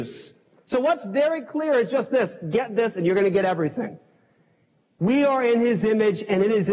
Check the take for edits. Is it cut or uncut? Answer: uncut